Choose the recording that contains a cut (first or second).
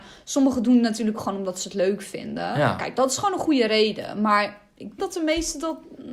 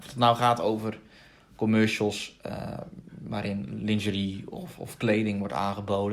first